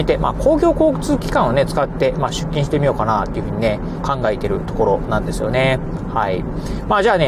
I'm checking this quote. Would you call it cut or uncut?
cut